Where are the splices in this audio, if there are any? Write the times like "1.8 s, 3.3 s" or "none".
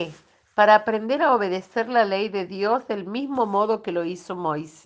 none